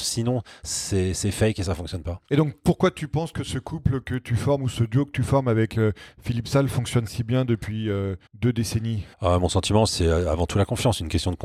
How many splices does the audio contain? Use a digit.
5